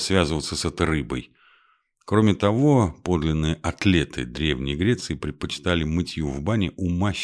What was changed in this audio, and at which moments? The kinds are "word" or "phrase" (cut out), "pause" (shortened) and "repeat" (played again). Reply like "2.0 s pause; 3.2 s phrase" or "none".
none